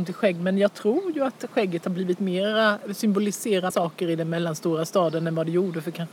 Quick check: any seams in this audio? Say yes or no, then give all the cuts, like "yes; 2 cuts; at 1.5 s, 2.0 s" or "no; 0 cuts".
yes; 1 cut; at 3.7 s